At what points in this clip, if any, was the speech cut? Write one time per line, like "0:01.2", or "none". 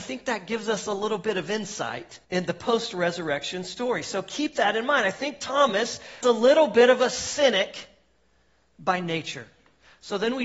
0:02.2
0:06.2